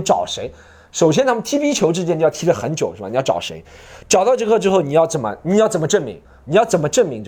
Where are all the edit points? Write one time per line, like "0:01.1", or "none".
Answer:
0:06.2